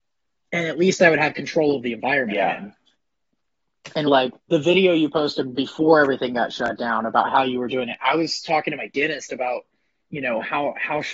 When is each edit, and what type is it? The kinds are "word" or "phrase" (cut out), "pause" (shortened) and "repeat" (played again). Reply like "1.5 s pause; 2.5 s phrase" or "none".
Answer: 4.1 s word; 4.4 s pause